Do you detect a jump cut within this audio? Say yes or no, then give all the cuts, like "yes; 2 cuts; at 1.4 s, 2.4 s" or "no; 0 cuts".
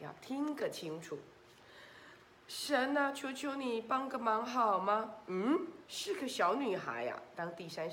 yes; 1 cut; at 5.9 s